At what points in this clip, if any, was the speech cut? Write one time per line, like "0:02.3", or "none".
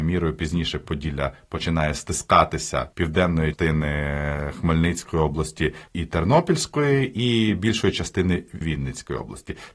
0:02.9
0:03.5
0:08.6